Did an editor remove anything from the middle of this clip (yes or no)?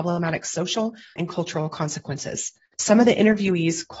yes